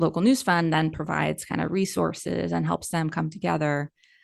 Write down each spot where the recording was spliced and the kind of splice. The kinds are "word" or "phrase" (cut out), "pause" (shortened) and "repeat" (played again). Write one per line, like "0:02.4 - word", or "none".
none

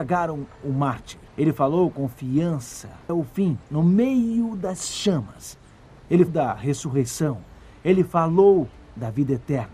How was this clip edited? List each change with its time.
0:01.3 - pause
0:01.9 - word
0:03.1 - word
0:03.6 - pause
0:06.3 - word

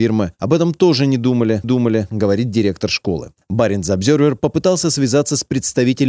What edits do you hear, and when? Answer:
0:01.6 - repeat

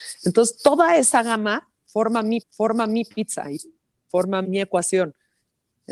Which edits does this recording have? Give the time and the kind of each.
0:02.4 - repeat
0:04.4 - word

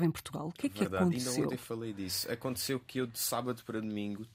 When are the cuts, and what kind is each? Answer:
none

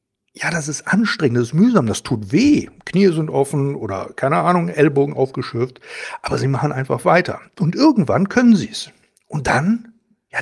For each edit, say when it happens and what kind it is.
none

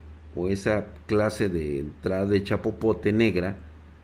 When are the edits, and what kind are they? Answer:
none

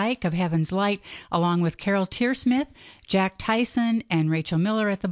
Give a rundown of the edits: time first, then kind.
none

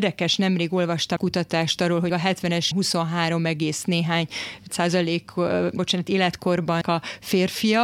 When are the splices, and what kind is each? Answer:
0:01.2 - word
0:02.1 - word
0:02.7 - word
0:04.7 - word
0:05.8 - word
0:06.8 - word

